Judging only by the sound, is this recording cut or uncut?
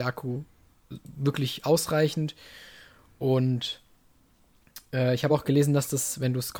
uncut